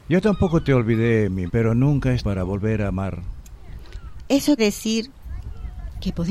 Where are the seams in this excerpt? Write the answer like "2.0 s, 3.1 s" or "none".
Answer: 1.5 s, 2.2 s, 4.6 s